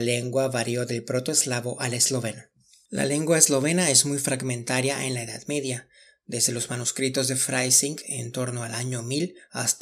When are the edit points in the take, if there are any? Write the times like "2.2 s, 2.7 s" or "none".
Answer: none

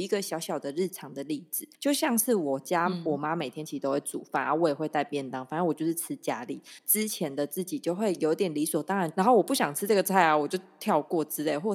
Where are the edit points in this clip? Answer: 1.8 s

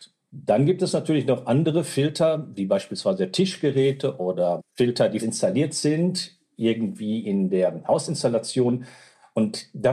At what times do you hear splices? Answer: 4.6 s, 5.2 s

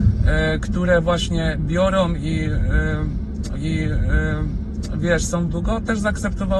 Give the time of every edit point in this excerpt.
3.6 s, 5.5 s

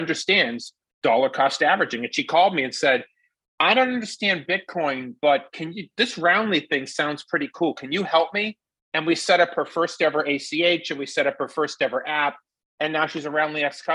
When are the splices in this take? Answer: none

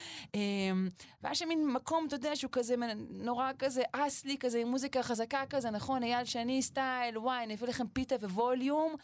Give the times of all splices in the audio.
none

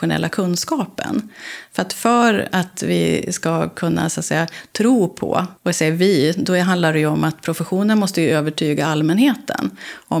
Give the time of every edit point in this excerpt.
5.6 s

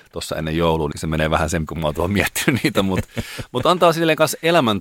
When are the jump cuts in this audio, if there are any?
0.9 s, 1.7 s

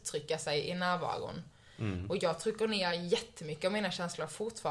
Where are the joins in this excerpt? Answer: none

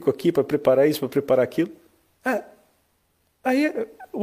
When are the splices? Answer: none

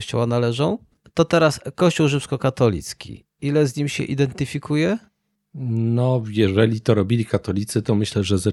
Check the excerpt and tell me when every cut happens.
none

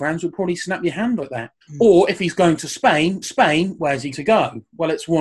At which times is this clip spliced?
1.2 s, 1.6 s, 3.2 s, 4.1 s

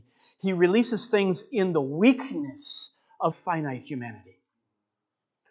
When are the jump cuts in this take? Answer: 3.3 s

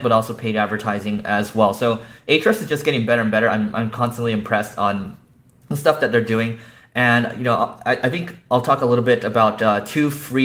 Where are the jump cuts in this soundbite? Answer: none

